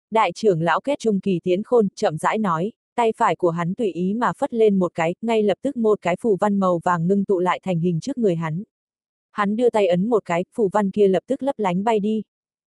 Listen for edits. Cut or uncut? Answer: cut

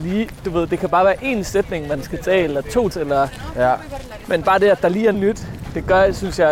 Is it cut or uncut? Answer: cut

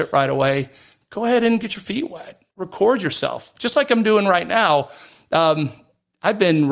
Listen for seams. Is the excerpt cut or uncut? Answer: uncut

